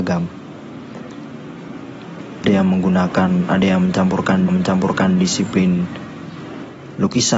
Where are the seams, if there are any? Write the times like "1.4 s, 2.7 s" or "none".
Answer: 2.4 s, 4.5 s